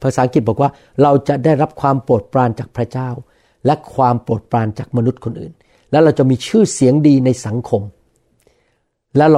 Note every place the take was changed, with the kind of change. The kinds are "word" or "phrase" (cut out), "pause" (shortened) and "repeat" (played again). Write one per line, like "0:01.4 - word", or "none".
none